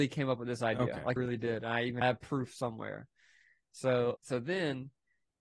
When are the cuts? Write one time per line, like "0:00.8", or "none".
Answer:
0:01.2
0:02.0
0:04.2